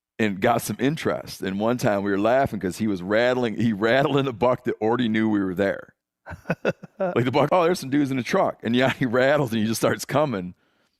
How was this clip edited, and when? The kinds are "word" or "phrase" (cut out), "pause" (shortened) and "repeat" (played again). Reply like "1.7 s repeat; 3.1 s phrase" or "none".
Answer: 6.0 s pause; 7.5 s word